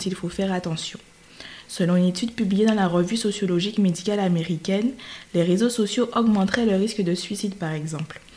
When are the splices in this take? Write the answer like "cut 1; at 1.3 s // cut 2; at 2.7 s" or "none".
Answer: none